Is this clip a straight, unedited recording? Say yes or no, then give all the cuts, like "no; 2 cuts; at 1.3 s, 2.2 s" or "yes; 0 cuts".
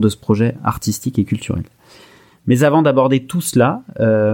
yes; 0 cuts